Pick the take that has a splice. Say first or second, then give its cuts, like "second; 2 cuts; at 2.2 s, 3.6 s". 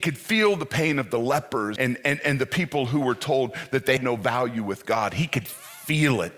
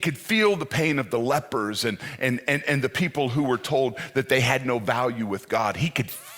first; 2 cuts; at 1.8 s, 4.0 s